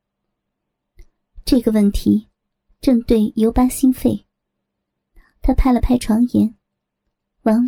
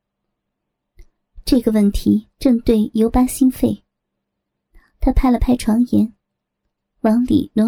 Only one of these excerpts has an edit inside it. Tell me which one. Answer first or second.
second